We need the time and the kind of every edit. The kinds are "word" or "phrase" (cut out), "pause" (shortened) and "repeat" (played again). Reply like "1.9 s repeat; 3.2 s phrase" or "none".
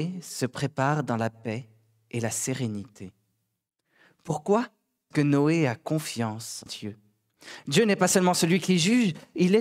5.1 s word; 6.7 s word